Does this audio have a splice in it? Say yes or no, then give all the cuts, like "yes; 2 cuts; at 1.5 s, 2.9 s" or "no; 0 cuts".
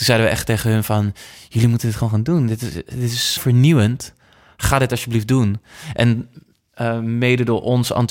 yes; 1 cut; at 3.4 s